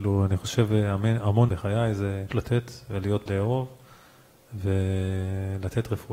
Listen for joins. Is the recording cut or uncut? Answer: cut